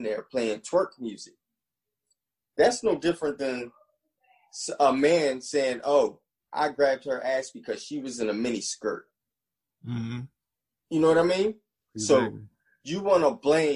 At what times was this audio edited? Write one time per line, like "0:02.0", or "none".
none